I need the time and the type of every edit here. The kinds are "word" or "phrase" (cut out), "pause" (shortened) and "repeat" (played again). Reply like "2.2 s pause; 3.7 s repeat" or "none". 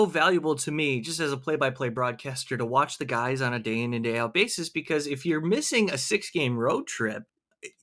none